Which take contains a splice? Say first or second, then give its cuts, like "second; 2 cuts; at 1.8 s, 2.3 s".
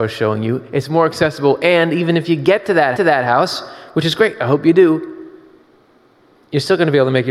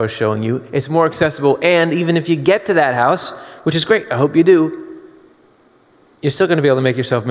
first; 1 cut; at 2.9 s